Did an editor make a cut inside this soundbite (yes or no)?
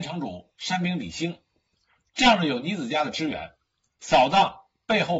no